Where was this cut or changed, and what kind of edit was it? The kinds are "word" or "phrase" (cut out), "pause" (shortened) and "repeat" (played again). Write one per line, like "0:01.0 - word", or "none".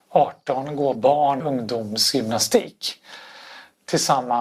0:00.9 - word
0:01.4 - word